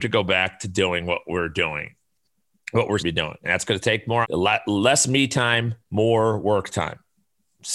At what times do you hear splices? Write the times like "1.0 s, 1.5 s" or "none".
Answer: 3.0 s, 4.2 s, 5.8 s

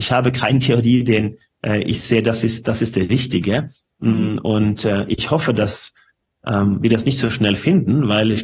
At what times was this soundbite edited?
none

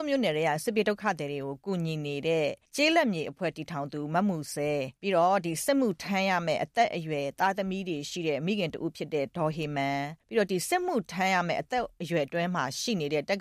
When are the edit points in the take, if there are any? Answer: 2.6 s, 5.0 s, 10.2 s

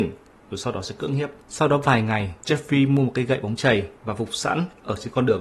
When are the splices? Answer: 1.4 s, 2.4 s, 4.0 s

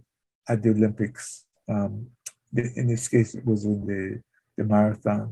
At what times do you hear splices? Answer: none

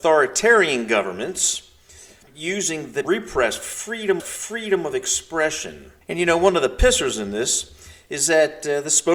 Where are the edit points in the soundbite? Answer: 2.3 s, 3.0 s, 4.2 s, 6.0 s

